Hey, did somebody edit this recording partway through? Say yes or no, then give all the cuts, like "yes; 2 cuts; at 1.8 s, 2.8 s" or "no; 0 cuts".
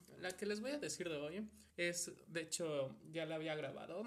yes; 1 cut; at 1.7 s